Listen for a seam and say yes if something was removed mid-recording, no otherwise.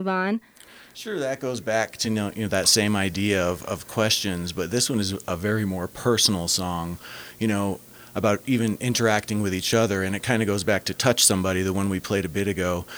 no